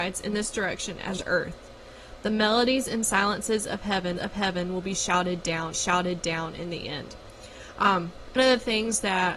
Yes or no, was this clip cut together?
yes